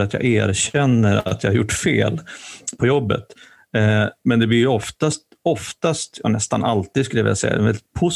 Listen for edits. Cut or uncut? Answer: uncut